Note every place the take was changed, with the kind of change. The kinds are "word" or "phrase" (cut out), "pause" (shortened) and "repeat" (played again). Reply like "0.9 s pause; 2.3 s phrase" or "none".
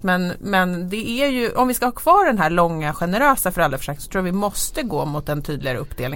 none

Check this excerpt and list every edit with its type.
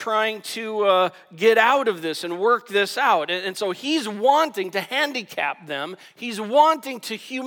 none

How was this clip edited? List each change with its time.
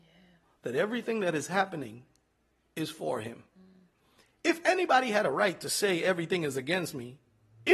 none

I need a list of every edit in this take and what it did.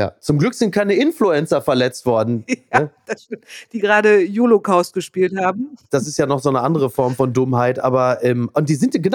none

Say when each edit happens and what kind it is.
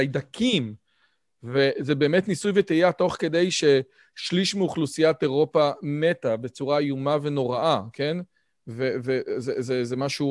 none

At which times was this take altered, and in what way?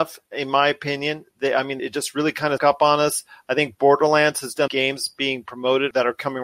1.8 s word; 2.6 s word; 4.7 s phrase

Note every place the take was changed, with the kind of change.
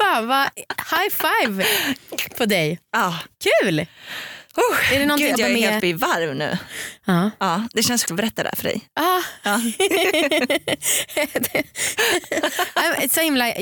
5.3 s word; 5.8 s word; 8.1 s word

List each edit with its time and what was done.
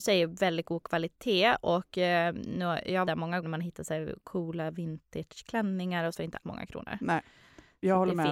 3.1 s word; 3.4 s word; 4.2 s pause; 6.1 s word; 6.4 s word

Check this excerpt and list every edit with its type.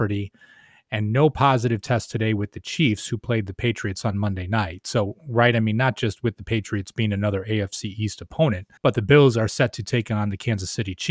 8.8 s pause

